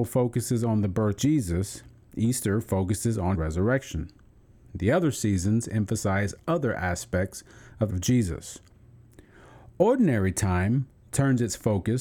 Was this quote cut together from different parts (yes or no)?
yes